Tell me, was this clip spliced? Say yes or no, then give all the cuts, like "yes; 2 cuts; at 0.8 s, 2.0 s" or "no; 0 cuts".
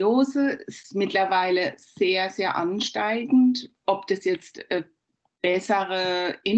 no; 0 cuts